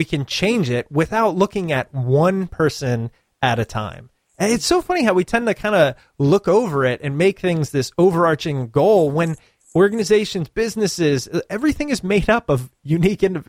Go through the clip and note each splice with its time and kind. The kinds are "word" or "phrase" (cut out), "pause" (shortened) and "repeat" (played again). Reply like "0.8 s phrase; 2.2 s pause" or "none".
none